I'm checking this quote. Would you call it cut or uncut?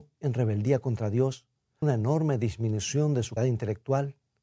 cut